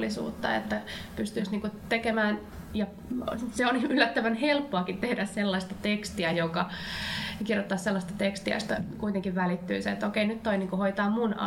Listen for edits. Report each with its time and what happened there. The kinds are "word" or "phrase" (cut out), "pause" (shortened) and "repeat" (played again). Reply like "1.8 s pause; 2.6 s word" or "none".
none